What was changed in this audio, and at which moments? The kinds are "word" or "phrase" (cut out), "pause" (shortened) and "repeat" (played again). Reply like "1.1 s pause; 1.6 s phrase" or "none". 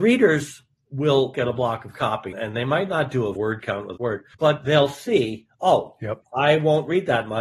1.3 s word; 2.3 s word; 3.3 s word; 4.0 s word; 4.3 s pause; 5.5 s pause